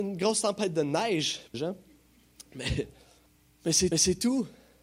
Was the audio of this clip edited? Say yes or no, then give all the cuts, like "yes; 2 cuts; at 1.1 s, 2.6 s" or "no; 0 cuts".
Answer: yes; 3 cuts; at 1.5 s, 3.3 s, 3.9 s